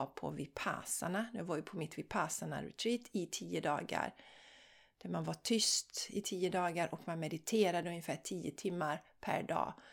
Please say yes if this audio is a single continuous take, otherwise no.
yes